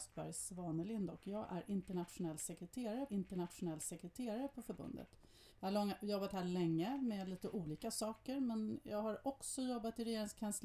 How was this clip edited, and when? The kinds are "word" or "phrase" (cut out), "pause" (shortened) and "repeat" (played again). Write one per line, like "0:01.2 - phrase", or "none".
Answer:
0:03.1 - repeat
0:05.5 - pause